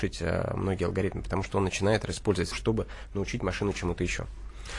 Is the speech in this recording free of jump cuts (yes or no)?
no